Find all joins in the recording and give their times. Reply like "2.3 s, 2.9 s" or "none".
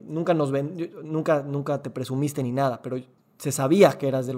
none

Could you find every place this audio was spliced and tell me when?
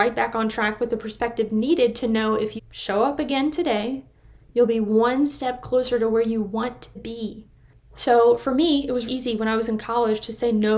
2.6 s, 6.9 s, 9.1 s

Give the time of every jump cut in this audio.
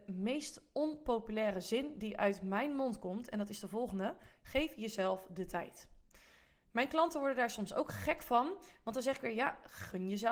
none

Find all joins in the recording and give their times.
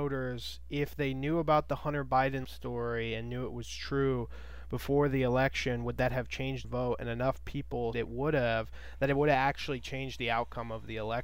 2.4 s, 6.6 s, 7.9 s

